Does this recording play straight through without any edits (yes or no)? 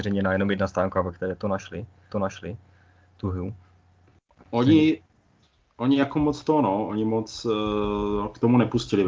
no